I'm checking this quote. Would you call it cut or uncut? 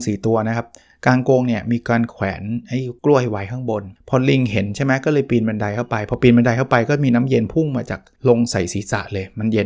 cut